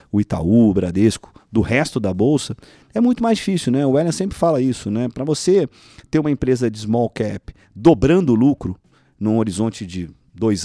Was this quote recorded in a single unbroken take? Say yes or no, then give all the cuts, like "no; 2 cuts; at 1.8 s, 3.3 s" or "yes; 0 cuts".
yes; 0 cuts